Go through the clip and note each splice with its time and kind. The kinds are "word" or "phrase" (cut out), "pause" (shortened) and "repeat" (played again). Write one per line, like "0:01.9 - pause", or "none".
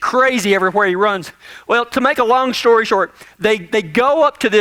none